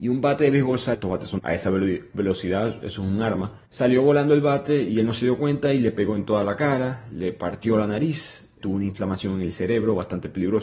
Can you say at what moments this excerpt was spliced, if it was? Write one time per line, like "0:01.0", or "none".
0:00.9
0:01.4
0:03.7
0:08.6